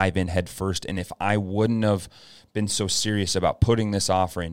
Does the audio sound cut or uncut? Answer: uncut